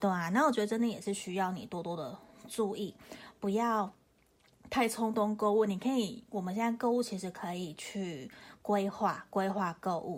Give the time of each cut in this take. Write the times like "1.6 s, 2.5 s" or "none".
none